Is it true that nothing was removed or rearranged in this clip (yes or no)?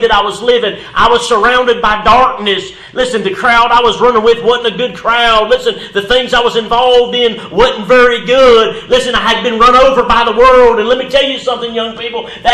yes